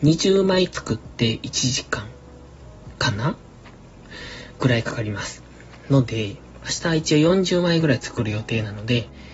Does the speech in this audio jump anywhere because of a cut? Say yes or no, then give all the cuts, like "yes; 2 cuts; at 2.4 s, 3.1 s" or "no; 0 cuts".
no; 0 cuts